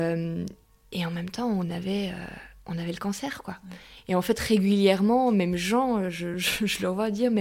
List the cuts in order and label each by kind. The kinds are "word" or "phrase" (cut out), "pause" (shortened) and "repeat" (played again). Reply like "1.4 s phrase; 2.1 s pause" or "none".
none